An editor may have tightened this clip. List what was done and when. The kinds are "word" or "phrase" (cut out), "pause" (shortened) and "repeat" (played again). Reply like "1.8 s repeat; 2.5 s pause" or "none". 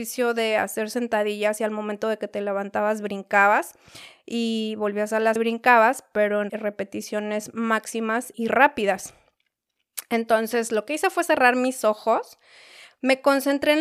5.4 s word; 6.5 s word; 8.3 s word